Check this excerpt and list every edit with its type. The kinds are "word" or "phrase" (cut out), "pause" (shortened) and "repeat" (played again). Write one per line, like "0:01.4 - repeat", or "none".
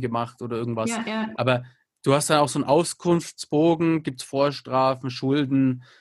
none